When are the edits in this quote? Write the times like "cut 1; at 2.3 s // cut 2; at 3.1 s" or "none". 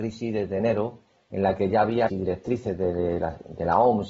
cut 1; at 2.1 s